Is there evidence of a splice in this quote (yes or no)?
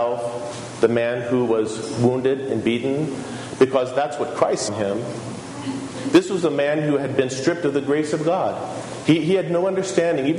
yes